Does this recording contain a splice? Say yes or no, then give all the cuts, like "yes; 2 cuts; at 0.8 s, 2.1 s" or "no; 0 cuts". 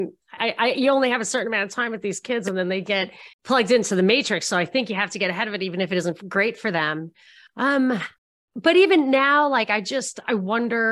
yes; 2 cuts; at 3.3 s, 8.2 s